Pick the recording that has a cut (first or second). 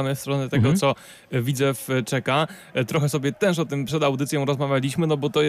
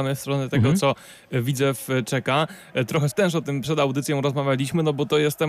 second